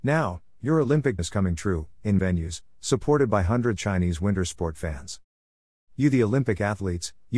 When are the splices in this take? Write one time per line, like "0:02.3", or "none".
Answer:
0:01.2
0:02.2
0:03.8